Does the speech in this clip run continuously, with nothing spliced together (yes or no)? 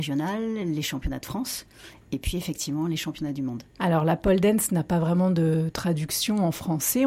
yes